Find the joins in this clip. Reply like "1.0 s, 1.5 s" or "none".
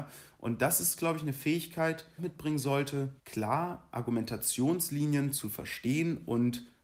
2.2 s, 3.2 s